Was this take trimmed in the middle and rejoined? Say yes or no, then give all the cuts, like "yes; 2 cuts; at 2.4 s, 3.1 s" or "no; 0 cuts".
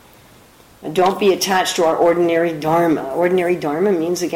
no; 0 cuts